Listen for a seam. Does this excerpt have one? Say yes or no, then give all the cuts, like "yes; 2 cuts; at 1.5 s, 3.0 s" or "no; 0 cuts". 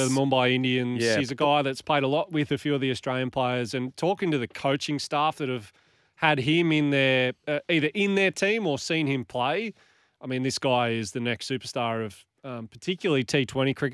no; 0 cuts